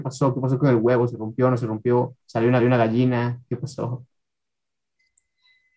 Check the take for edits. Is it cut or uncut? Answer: cut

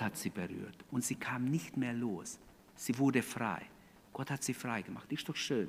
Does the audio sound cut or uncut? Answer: uncut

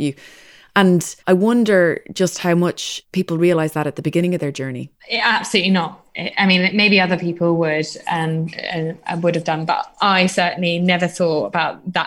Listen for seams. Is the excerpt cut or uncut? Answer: cut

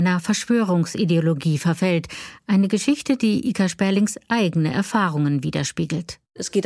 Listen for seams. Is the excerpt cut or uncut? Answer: uncut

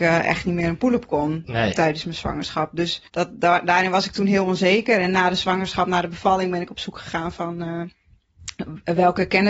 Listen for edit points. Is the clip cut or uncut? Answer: cut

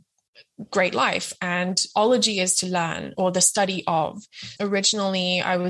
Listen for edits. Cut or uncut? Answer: cut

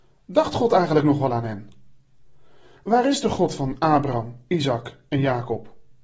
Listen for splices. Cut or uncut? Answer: uncut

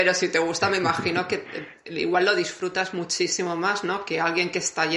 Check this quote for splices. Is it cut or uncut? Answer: uncut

